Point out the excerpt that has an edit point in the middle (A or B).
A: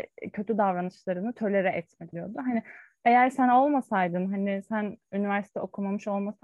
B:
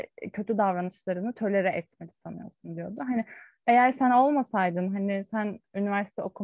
A